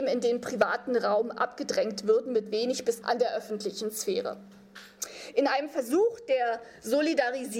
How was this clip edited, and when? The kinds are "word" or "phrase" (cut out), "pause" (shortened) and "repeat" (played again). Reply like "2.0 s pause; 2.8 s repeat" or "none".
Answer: 3.0 s phrase